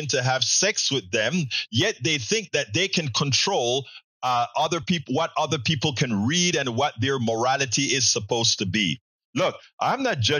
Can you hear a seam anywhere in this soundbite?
no; 0 cuts

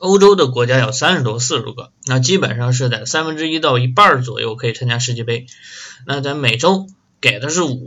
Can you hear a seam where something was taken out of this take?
yes; 1 cut; at 2.0 s

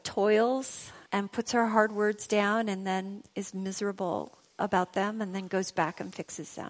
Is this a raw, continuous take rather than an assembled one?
no; 1 cut; at 1.1 s

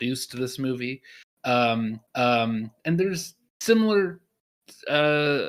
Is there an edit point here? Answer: yes; 1 cut; at 2.1 s

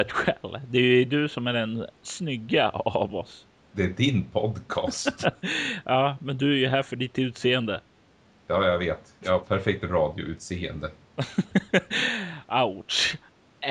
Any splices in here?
no; 0 cuts

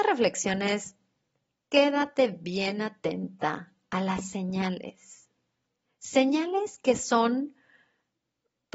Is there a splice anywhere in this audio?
no; 0 cuts

